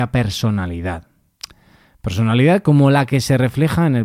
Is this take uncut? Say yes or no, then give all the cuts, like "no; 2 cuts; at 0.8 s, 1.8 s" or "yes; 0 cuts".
yes; 0 cuts